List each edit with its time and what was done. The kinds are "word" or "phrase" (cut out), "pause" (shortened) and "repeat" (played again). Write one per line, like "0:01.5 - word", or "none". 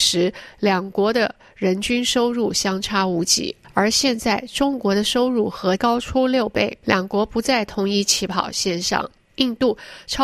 0:05.8 - word